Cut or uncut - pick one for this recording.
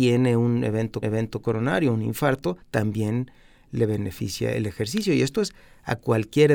cut